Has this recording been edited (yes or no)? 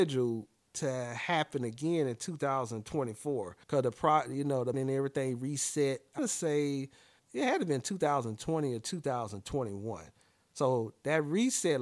yes